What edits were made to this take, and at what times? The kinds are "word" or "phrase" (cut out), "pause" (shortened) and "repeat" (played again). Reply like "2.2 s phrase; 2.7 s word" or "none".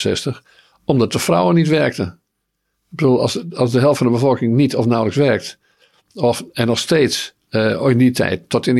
none